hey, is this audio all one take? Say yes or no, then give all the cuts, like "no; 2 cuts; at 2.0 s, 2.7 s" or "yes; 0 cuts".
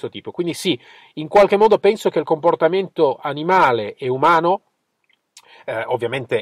yes; 0 cuts